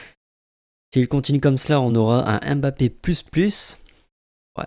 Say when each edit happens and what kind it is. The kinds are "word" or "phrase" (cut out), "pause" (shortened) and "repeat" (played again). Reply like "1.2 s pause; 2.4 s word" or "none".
none